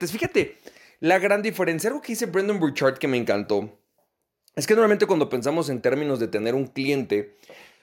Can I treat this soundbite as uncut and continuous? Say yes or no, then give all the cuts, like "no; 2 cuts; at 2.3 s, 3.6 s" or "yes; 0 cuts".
yes; 0 cuts